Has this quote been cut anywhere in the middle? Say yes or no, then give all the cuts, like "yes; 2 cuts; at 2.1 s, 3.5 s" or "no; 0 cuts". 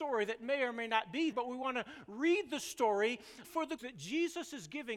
yes; 3 cuts; at 1.3 s, 3.4 s, 3.8 s